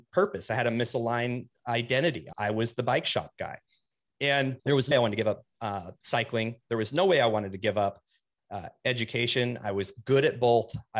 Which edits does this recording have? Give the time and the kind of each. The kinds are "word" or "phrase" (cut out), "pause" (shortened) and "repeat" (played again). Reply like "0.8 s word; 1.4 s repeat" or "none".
2.3 s word; 4.6 s pause; 4.9 s word